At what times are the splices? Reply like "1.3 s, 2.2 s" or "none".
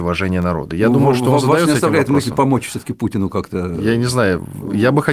none